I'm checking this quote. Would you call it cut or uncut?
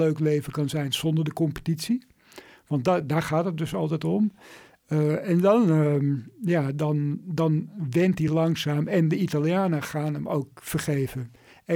uncut